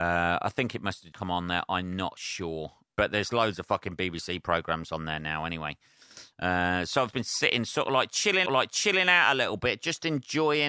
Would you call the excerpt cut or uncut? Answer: cut